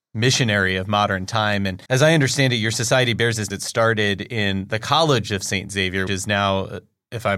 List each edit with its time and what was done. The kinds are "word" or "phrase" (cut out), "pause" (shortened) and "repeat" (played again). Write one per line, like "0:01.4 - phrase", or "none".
0:01.9 - pause
0:03.5 - phrase
0:06.1 - word